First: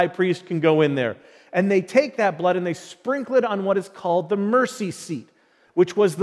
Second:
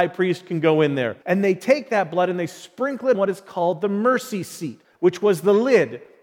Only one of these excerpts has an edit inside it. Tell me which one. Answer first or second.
second